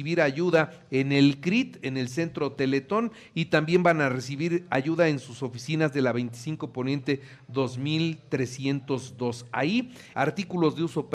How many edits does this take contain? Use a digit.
1